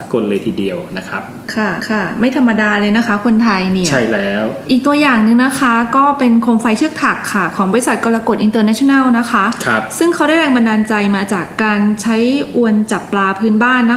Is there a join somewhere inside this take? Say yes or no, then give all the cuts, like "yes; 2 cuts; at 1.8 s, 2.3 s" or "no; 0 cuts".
yes; 1 cut; at 1.8 s